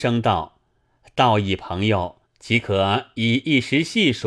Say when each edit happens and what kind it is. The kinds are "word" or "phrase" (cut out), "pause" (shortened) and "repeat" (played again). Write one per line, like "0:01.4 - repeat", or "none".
0:02.2 - pause